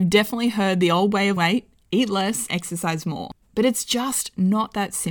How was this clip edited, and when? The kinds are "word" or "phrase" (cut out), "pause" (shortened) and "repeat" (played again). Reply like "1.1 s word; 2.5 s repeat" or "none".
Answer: 1.4 s word; 2.5 s word; 3.4 s pause